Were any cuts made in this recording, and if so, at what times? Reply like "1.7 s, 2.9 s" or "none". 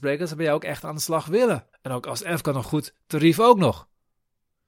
1.7 s, 2.6 s